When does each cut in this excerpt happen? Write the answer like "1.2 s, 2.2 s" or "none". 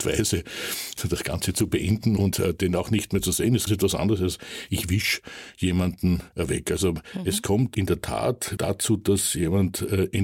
2.3 s, 3.7 s, 6.3 s, 8.6 s